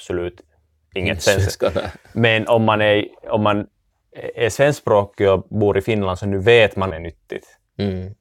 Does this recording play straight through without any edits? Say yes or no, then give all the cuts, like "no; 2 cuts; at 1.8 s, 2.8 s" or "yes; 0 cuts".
no; 1 cut; at 6.9 s